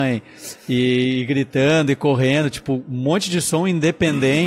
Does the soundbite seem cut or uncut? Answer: uncut